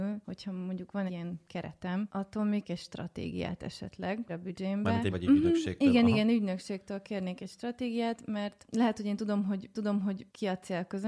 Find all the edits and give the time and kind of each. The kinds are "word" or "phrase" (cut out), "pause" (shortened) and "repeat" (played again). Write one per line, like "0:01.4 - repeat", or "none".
0:01.1 - word
0:02.6 - word
0:04.3 - phrase
0:05.1 - word
0:09.7 - repeat